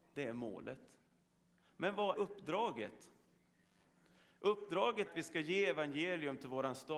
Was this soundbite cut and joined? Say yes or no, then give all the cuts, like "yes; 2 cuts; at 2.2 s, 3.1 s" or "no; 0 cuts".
yes; 2 cuts; at 2.1 s, 5.1 s